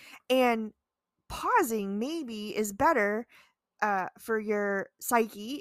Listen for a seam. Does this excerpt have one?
no; 0 cuts

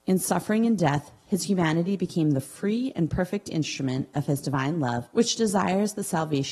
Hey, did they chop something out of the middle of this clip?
yes; 1 cut; at 5.1 s

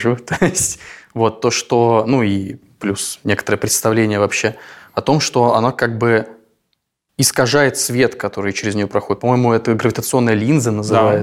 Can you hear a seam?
no; 0 cuts

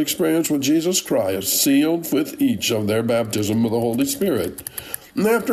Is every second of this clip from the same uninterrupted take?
yes; 0 cuts

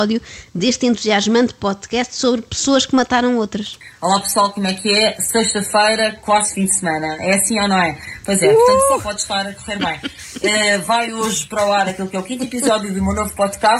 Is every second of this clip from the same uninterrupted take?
yes; 0 cuts

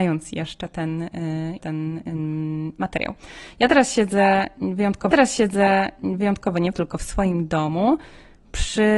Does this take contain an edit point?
yes; 3 cuts; at 1.6 s, 5.1 s, 6.7 s

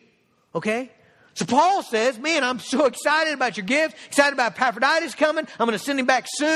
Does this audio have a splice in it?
no; 0 cuts

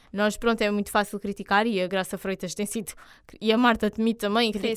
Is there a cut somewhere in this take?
no; 0 cuts

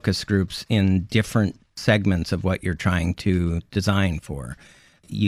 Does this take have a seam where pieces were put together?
no; 0 cuts

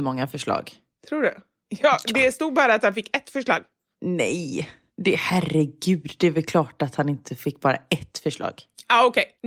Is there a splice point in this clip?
no; 0 cuts

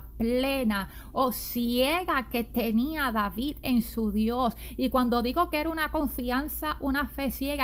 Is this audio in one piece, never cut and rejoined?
yes; 0 cuts

